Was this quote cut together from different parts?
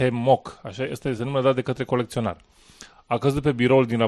no; 0 cuts

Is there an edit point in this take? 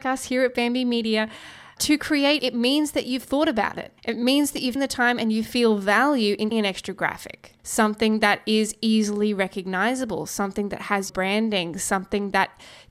yes; 6 cuts; at 2.4 s, 4.0 s, 4.8 s, 6.5 s, 7.6 s, 11.1 s

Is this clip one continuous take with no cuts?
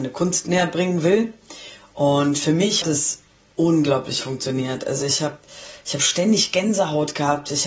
no; 1 cut; at 2.8 s

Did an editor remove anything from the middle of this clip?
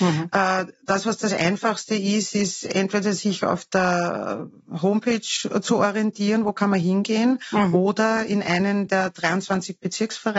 no; 0 cuts

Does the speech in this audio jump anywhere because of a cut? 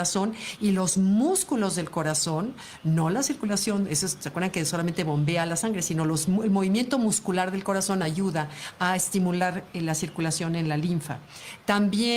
no; 0 cuts

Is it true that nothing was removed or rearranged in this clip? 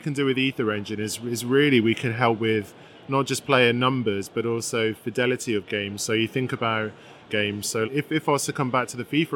no; 3 cuts; at 5.7 s, 7.3 s, 7.8 s

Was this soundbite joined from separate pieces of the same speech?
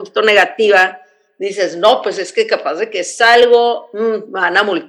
no; 0 cuts

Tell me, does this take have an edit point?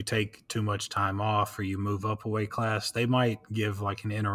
no; 0 cuts

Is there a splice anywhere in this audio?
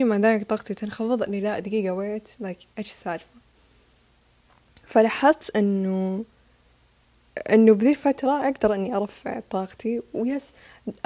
no; 0 cuts

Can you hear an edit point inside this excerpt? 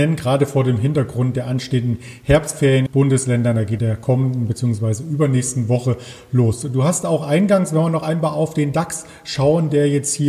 yes; 2 cuts; at 2.9 s, 3.8 s

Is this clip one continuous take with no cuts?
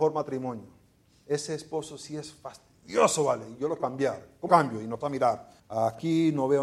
no; 4 cuts; at 3.8 s, 4.5 s, 5.0 s, 5.6 s

